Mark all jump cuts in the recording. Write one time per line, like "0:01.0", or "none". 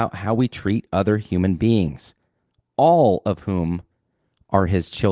none